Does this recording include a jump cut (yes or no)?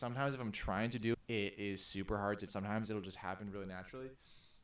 yes